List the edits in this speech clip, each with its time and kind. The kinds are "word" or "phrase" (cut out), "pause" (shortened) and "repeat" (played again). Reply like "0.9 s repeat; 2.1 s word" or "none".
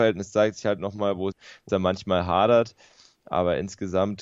1.3 s word; 1.7 s word